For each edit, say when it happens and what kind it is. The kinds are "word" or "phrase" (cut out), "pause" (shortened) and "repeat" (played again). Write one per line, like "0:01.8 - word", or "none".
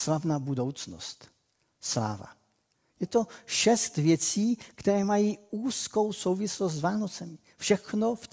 none